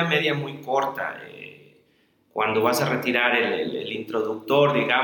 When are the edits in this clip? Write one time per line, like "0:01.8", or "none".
none